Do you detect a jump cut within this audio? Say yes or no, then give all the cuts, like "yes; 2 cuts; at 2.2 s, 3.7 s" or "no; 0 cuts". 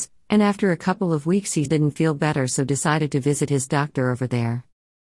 yes; 1 cut; at 1.7 s